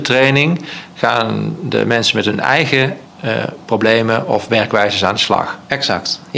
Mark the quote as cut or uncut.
uncut